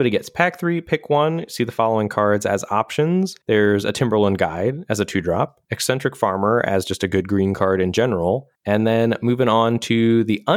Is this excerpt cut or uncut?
cut